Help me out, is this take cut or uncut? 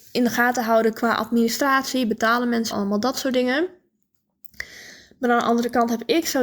cut